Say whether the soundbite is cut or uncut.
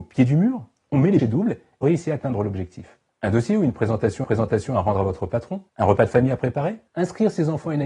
cut